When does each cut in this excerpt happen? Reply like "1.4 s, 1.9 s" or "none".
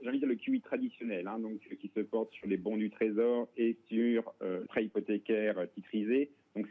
4.7 s